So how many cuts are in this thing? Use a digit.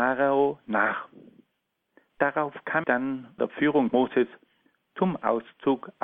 3